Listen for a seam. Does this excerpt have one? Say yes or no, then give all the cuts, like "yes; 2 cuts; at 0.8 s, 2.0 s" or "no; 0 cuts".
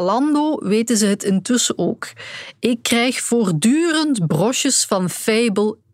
no; 0 cuts